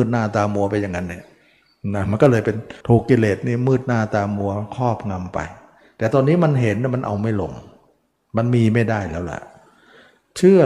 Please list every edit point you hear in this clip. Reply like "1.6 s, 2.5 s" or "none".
2.8 s